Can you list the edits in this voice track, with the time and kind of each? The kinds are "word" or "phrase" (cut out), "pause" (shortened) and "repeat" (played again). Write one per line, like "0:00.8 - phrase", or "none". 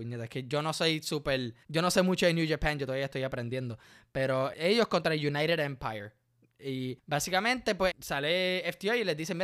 0:01.6 - pause
0:04.5 - word
0:07.0 - pause
0:07.9 - word